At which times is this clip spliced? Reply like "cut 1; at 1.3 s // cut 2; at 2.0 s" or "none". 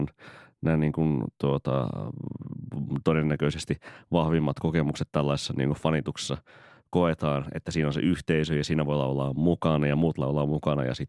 none